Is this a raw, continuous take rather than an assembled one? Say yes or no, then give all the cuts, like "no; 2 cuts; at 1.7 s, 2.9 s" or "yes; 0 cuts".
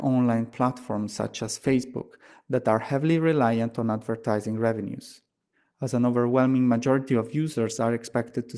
yes; 0 cuts